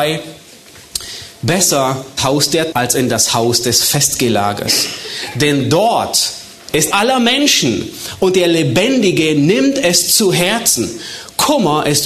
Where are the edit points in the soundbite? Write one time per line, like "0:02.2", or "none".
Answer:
0:02.2
0:02.7
0:06.9